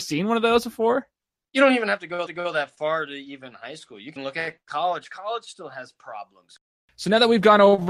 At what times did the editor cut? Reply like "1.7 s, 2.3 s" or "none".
2.3 s, 4.2 s